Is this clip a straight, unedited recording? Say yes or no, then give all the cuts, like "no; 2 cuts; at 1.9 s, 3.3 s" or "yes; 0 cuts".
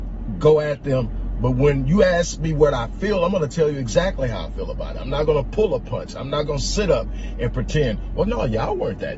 yes; 0 cuts